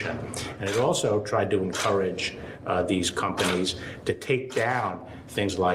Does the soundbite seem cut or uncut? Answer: uncut